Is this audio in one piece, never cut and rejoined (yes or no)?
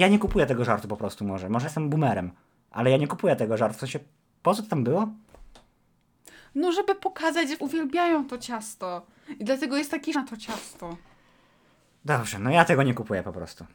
no